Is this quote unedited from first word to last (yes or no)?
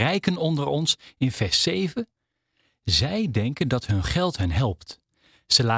yes